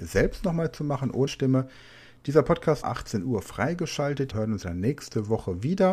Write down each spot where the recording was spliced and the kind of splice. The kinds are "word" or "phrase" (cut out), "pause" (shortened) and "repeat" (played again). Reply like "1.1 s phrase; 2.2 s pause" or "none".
1.3 s word; 2.8 s phrase; 4.3 s phrase; 4.6 s word